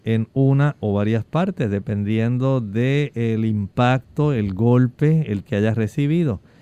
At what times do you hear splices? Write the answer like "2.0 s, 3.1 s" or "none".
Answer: 5.5 s